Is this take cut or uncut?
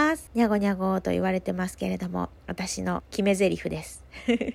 cut